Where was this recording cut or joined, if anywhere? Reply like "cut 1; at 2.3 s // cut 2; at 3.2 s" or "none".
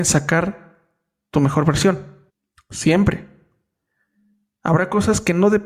cut 1; at 2.3 s